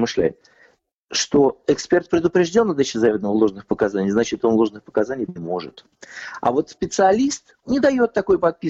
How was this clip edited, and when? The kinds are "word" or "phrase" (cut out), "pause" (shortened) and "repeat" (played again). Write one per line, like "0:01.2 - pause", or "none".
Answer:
0:05.3 - word
0:07.6 - word